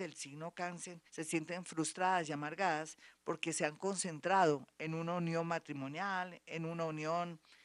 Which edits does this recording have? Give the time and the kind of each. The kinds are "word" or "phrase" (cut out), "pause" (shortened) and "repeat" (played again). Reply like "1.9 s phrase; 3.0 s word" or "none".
1.1 s pause